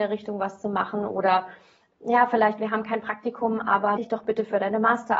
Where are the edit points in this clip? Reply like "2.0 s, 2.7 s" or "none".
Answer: 4.0 s